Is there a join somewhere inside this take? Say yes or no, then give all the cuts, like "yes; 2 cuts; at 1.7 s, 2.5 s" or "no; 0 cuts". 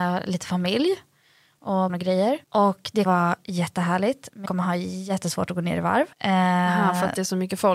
yes; 5 cuts; at 1.9 s, 2.4 s, 3.1 s, 4.5 s, 6.1 s